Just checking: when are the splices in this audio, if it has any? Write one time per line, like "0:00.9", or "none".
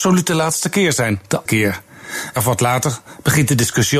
0:01.5
0:02.4